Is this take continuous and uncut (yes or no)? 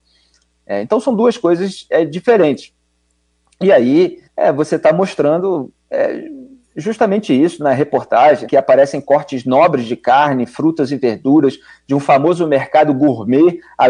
no